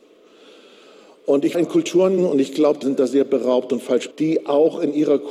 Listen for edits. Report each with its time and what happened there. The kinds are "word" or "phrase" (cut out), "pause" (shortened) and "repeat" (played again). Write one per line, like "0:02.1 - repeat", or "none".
0:01.5 - word
0:02.2 - word
0:02.8 - word
0:04.1 - word